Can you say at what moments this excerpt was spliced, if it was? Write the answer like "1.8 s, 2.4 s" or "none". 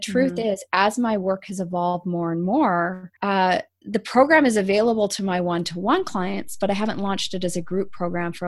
3.2 s